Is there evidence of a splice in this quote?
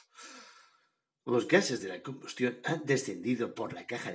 no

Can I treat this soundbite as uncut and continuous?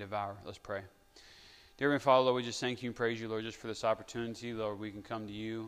yes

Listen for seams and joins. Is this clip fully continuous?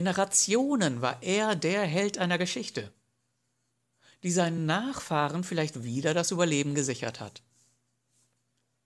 yes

